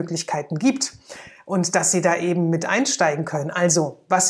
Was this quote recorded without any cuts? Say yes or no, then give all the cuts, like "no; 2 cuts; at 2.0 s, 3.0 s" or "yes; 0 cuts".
yes; 0 cuts